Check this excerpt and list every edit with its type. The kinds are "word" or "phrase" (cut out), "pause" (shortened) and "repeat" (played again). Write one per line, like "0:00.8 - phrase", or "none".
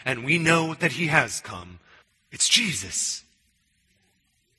0:02.0 - pause